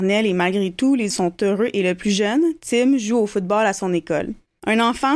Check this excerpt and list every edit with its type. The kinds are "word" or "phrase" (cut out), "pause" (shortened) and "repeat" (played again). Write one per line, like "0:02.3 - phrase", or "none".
0:01.1 - word